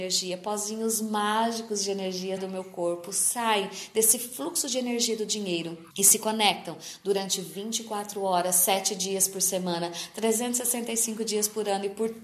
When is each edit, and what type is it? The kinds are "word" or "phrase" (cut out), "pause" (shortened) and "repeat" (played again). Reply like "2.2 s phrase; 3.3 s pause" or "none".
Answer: 2.4 s word; 5.9 s pause